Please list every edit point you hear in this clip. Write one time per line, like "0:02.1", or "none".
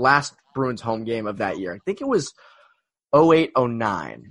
none